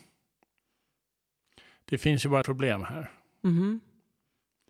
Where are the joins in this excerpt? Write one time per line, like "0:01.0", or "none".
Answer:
0:02.4